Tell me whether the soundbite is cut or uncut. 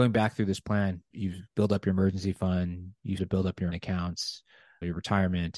cut